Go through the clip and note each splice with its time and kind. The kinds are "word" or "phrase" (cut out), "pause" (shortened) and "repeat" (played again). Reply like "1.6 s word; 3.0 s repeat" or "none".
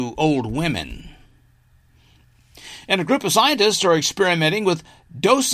none